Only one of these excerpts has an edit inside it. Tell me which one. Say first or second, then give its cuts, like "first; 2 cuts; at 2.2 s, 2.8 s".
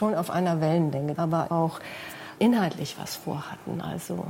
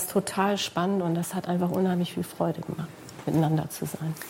first; 3 cuts; at 1.1 s, 1.5 s, 2.4 s